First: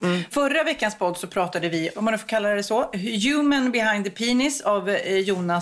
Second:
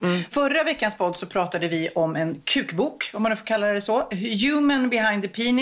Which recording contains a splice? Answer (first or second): first